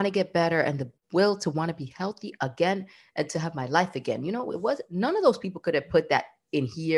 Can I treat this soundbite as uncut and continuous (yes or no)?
yes